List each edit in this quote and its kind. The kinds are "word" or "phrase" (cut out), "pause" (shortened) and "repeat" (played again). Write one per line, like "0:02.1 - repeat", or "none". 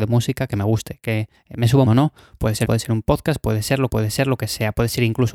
0:01.3 - pause
0:01.9 - phrase
0:02.6 - word
0:03.9 - repeat